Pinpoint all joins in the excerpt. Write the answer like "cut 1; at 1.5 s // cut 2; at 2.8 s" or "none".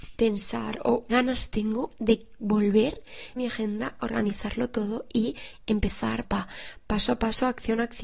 cut 1; at 1.1 s // cut 2; at 3.4 s // cut 3; at 6.2 s